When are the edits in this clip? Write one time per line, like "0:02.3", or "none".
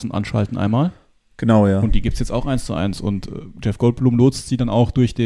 none